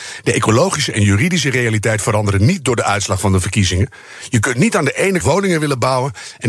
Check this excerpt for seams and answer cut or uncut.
cut